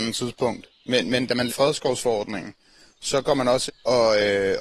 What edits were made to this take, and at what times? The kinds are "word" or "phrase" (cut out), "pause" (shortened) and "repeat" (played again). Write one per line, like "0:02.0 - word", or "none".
0:01.5 - word
0:03.7 - word